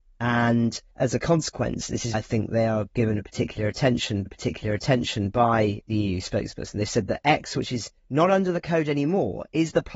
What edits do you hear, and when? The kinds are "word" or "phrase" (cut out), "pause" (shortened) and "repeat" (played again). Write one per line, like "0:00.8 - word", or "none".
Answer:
0:00.9 - pause
0:02.1 - word
0:04.3 - repeat
0:08.0 - pause